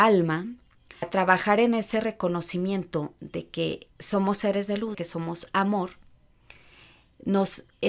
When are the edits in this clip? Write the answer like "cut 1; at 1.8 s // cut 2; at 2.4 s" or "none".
cut 1; at 1.0 s // cut 2; at 3.9 s // cut 3; at 4.9 s